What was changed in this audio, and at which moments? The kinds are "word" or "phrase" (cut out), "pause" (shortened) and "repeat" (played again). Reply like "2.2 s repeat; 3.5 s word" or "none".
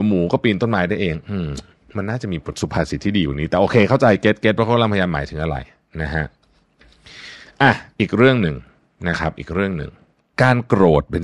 none